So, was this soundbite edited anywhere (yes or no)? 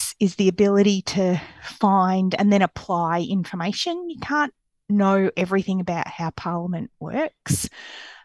no